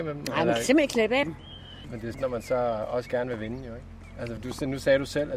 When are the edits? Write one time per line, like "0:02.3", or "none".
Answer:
0:01.2
0:02.1
0:04.4